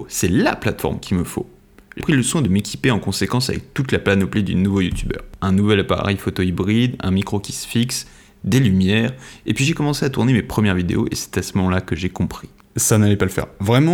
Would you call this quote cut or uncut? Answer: cut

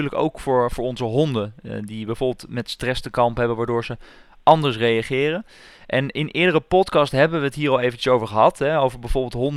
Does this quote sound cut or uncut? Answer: uncut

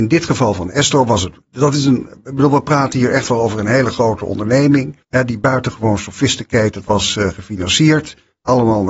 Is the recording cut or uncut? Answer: cut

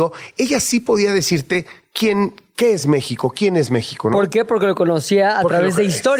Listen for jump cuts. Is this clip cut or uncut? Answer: uncut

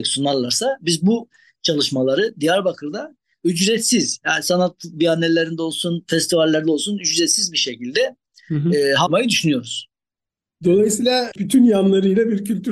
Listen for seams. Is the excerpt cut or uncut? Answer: uncut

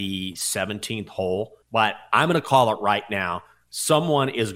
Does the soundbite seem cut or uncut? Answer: cut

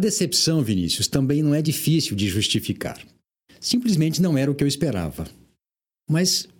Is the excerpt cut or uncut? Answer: uncut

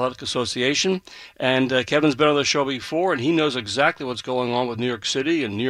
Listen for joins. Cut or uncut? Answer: uncut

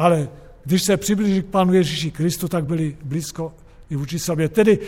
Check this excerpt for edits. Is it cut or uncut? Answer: uncut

